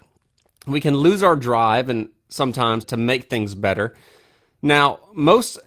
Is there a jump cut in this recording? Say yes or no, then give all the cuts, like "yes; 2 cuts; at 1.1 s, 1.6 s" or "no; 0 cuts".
yes; 1 cut; at 2.8 s